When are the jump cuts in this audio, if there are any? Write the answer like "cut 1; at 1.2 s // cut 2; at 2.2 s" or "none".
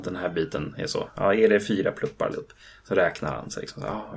cut 1; at 2.3 s